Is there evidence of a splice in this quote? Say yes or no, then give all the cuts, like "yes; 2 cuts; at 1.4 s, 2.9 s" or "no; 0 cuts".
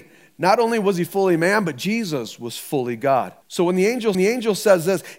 yes; 2 cuts; at 3.4 s, 4.1 s